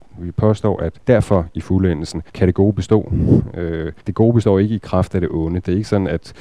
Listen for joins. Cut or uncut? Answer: cut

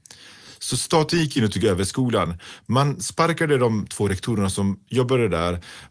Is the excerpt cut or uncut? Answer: uncut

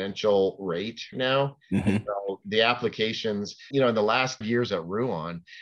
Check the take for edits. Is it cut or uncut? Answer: cut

